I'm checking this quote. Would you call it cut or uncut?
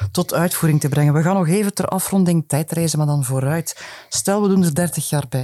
uncut